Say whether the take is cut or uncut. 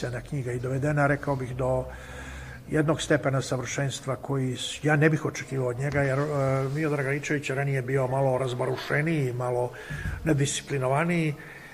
uncut